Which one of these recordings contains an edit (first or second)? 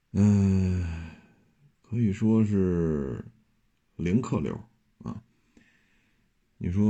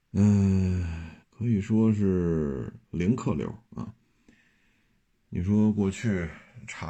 second